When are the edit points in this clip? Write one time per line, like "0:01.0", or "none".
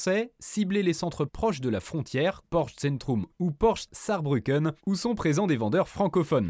0:01.3
0:02.4
0:03.3
0:03.9